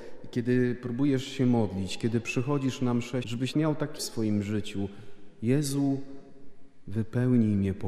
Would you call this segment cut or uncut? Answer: cut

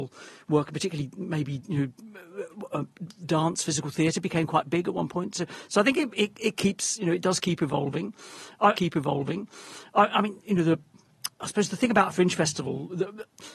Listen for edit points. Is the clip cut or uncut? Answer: cut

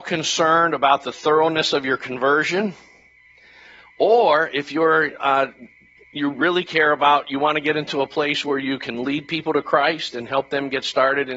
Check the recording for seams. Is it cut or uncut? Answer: uncut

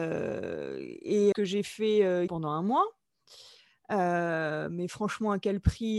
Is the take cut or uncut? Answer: cut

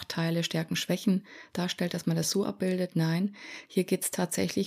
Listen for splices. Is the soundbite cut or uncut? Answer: uncut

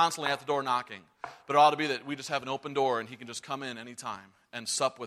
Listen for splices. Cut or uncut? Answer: uncut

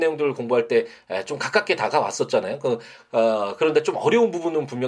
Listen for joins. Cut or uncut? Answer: uncut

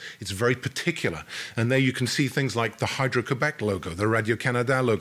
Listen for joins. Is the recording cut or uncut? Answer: uncut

